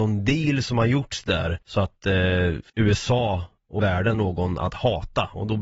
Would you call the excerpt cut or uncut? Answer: cut